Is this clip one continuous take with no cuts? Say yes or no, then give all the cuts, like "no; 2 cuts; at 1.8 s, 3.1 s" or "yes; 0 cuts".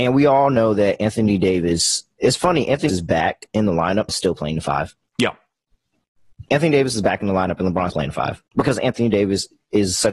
no; 5 cuts; at 2.9 s, 4.1 s, 5.1 s, 7.9 s, 8.5 s